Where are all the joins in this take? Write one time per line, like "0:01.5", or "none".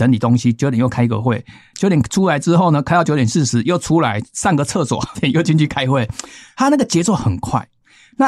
0:05.1